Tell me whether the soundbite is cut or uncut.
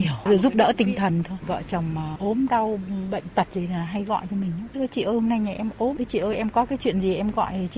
uncut